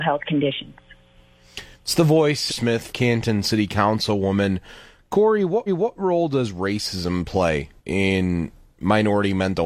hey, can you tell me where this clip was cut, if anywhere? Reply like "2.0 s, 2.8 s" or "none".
1.7 s, 2.5 s, 2.9 s, 5.7 s, 7.8 s